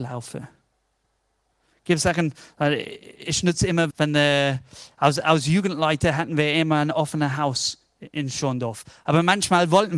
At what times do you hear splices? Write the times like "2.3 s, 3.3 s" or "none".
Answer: 3.9 s